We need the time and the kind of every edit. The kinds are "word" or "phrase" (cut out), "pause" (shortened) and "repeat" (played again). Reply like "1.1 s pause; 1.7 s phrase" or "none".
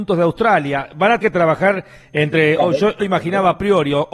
1.2 s word; 3.0 s word